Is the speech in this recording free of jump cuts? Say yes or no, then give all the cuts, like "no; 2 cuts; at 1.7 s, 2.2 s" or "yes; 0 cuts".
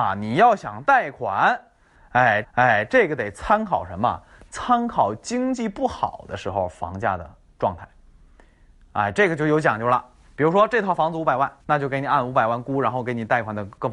no; 2 cuts; at 2.4 s, 11.6 s